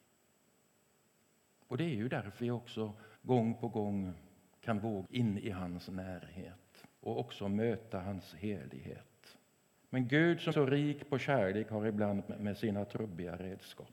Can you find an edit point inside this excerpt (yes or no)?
yes